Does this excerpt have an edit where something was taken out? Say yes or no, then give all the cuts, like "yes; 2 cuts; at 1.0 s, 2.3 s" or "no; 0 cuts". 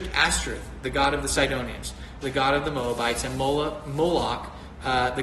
yes; 1 cut; at 2.2 s